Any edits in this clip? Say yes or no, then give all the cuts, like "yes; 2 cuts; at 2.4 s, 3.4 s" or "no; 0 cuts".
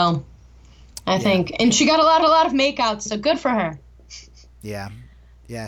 yes; 2 cuts; at 2.2 s, 3.1 s